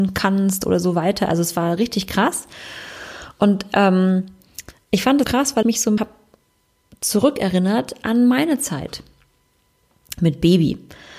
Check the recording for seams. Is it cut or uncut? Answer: cut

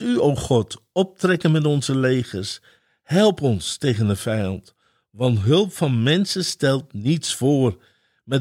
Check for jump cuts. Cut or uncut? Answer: uncut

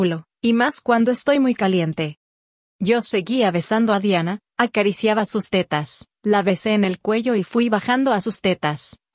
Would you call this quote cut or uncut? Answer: uncut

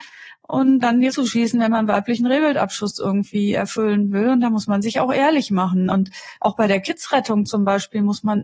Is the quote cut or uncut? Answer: cut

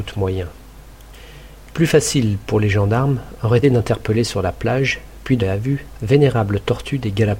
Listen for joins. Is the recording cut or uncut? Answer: cut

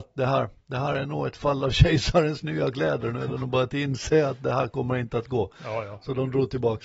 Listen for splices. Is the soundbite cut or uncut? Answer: uncut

